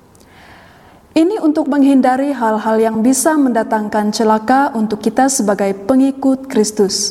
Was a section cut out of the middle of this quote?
no; 0 cuts

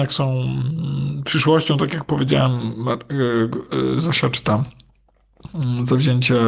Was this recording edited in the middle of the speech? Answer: no; 0 cuts

